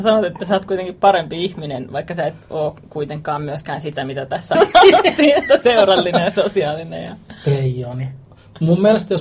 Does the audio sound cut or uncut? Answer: cut